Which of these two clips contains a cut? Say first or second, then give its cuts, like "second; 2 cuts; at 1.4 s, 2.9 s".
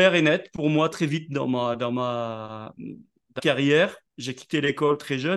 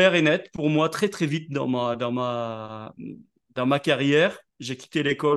first; 2 cuts; at 0.9 s, 3.4 s